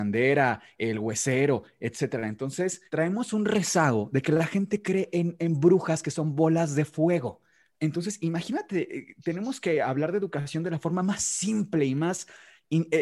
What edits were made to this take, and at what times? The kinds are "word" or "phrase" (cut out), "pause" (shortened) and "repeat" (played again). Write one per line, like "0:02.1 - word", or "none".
0:02.9 - pause
0:07.7 - pause